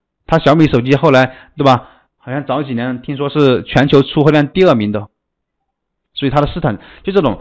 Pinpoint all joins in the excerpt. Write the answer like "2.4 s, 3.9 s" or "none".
none